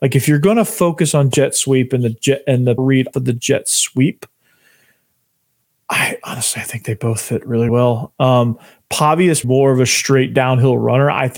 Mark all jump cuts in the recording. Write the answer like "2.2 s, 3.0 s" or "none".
2.8 s, 3.1 s, 7.7 s, 9.4 s